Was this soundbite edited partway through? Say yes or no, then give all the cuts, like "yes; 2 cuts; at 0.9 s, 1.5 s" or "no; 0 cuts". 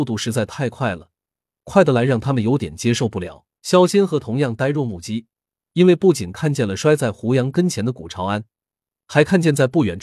yes; 1 cut; at 3.5 s